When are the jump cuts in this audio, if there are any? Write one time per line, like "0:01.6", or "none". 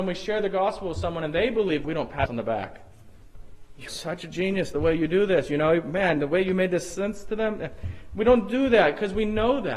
0:01.8
0:02.3
0:03.9